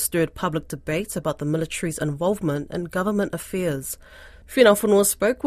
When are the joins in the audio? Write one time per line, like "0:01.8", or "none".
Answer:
none